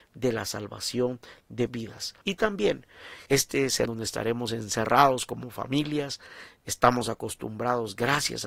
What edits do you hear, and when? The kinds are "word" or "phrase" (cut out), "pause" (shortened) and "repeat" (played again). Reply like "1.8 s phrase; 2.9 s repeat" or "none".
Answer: 1.7 s word; 2.2 s pause; 3.3 s pause; 3.9 s phrase